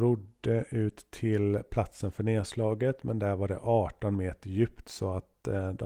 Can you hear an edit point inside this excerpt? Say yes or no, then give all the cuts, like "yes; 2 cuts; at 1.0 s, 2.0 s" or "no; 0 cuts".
no; 0 cuts